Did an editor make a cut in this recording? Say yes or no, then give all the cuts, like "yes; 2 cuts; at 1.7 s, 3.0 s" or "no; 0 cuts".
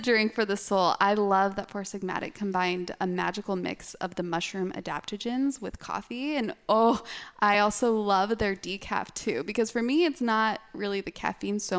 no; 0 cuts